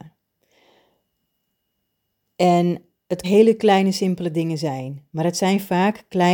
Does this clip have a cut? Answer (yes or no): yes